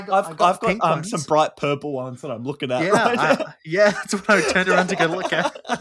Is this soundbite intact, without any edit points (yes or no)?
yes